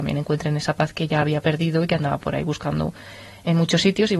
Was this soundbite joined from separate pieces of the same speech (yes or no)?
no